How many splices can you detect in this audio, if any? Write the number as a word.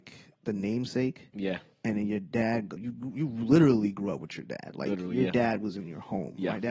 one